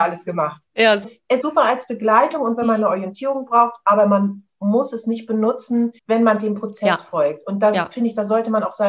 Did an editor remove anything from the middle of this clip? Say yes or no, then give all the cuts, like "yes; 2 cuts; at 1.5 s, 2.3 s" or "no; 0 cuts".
yes; 3 cuts; at 1.0 s, 1.4 s, 6.0 s